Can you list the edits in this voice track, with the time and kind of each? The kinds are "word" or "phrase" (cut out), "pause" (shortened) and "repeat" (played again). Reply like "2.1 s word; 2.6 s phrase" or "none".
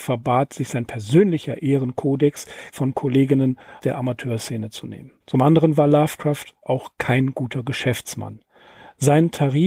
2.7 s word; 3.8 s word; 5.2 s pause; 6.6 s word

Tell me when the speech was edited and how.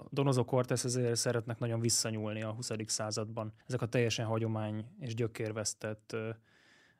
3.6 s pause

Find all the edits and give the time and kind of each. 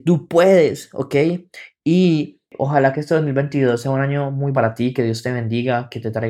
4.5 s word

